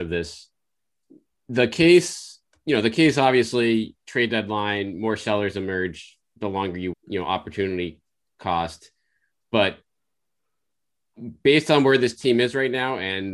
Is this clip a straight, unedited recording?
no; 1 cut; at 6.9 s

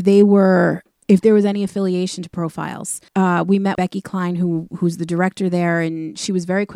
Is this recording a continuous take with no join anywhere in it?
no; 2 cuts; at 3.1 s, 3.7 s

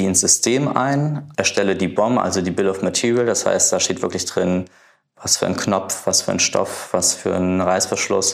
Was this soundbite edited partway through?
no; 0 cuts

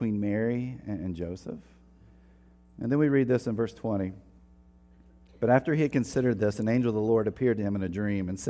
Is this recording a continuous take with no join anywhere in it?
yes; 0 cuts

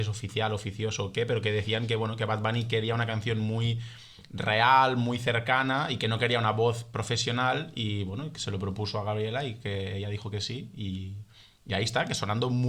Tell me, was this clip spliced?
no; 0 cuts

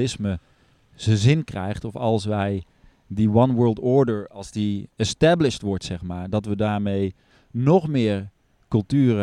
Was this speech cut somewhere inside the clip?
yes; 1 cut; at 4.9 s

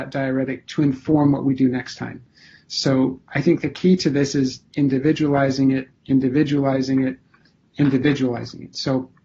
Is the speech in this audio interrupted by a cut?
no; 0 cuts

